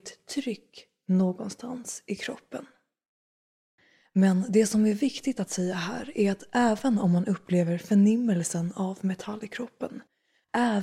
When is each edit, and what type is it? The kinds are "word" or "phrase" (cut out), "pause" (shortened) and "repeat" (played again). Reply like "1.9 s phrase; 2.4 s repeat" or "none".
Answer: none